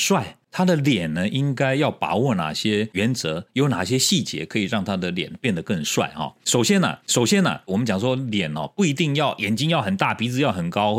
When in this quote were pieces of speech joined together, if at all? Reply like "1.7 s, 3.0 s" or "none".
7.0 s

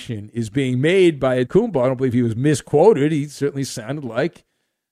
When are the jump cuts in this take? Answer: 1.5 s

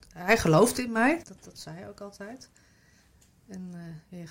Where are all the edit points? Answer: 1.2 s

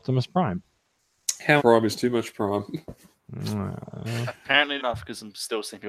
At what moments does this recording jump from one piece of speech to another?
1.6 s, 4.8 s

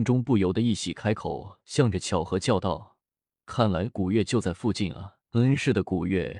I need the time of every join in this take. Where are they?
5.2 s

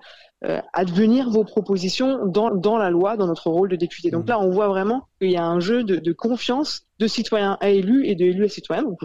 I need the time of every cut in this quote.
2.5 s, 5.1 s, 6.9 s

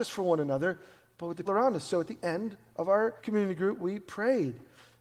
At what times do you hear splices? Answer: 1.5 s, 3.2 s

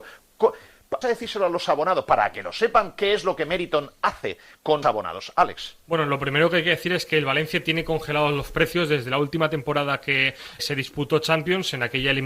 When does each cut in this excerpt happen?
1.0 s, 4.8 s, 10.6 s

